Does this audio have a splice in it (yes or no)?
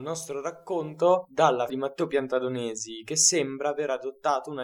yes